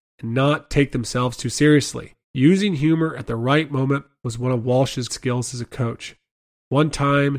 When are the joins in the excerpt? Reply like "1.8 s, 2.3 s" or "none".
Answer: 2.2 s, 5.1 s